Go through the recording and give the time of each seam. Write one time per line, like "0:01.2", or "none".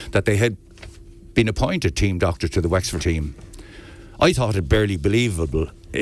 0:03.0